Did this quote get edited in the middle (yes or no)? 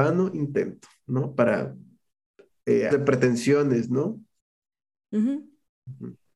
yes